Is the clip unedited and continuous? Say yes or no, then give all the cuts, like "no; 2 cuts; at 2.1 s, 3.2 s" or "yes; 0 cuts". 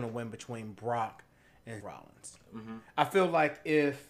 no; 1 cut; at 1.8 s